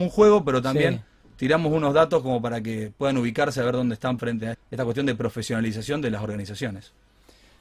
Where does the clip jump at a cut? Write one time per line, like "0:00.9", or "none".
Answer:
0:04.2
0:04.5